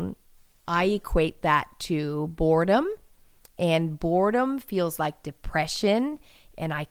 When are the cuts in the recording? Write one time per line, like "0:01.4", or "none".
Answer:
none